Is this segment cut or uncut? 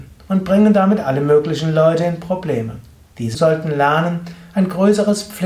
cut